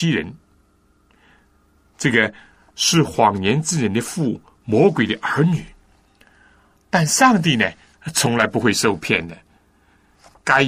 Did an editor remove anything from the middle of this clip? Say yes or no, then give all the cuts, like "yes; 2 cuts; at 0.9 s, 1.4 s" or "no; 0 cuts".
no; 0 cuts